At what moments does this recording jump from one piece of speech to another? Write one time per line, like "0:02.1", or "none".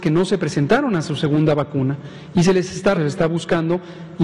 0:02.9